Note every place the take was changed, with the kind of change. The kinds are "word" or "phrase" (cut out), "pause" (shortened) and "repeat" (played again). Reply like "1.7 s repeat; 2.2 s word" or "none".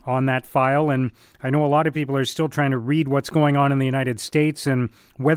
none